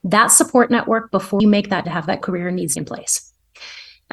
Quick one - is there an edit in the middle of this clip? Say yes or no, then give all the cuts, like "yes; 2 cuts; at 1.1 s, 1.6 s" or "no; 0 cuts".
yes; 4 cuts; at 1.4 s, 1.8 s, 2.2 s, 2.8 s